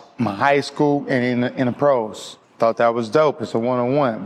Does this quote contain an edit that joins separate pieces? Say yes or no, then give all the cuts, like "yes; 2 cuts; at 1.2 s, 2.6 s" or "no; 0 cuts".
yes; 1 cut; at 2.4 s